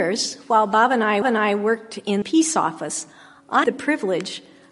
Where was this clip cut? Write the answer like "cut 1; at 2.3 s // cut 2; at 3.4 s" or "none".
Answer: cut 1; at 1.2 s // cut 2; at 2.2 s // cut 3; at 3.6 s